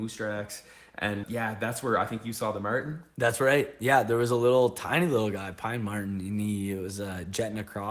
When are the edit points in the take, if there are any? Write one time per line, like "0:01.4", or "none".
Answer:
0:01.2